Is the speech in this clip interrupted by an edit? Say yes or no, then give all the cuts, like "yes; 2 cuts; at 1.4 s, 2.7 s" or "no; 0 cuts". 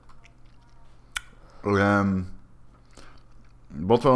no; 0 cuts